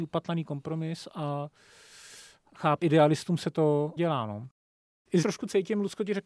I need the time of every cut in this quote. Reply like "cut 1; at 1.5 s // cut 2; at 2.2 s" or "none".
cut 1; at 2.8 s // cut 2; at 4.0 s // cut 3; at 5.2 s